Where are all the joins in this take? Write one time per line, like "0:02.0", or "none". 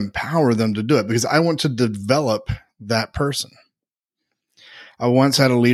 none